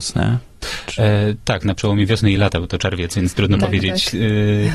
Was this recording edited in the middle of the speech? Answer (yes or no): no